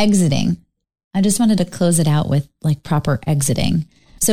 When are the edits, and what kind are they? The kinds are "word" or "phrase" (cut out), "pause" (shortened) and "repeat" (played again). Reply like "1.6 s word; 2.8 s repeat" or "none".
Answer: none